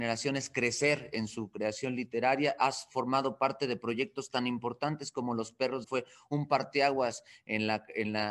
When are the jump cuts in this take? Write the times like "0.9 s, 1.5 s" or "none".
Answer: 5.8 s